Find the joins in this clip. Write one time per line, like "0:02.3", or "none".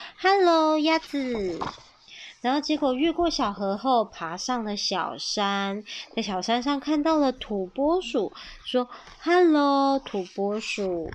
none